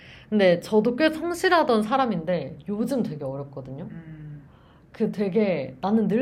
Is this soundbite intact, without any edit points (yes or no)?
yes